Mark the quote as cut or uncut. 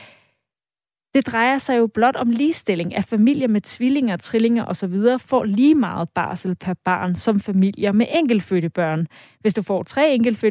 uncut